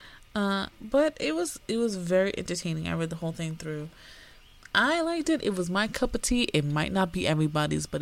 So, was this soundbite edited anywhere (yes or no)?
no